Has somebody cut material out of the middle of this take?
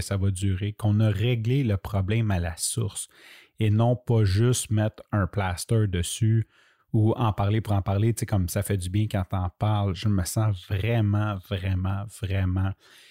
no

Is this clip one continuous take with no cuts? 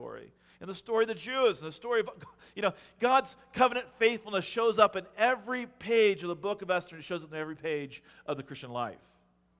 yes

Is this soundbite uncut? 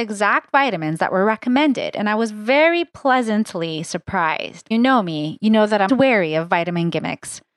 no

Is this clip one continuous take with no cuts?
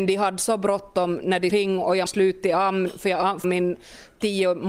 no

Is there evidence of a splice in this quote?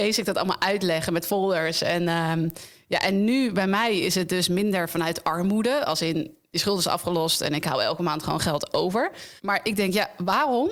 yes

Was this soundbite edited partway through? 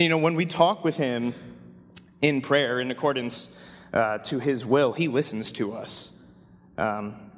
no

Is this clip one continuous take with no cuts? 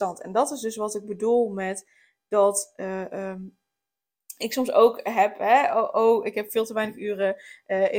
yes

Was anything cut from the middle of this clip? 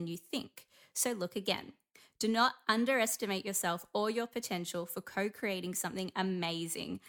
no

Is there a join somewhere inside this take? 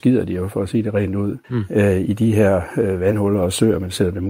yes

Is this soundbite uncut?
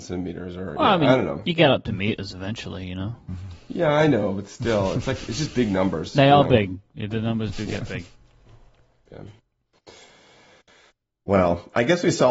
yes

